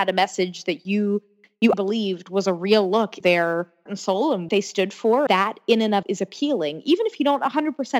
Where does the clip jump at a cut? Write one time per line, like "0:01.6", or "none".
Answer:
0:01.7
0:03.2
0:03.9
0:04.5
0:05.3
0:06.0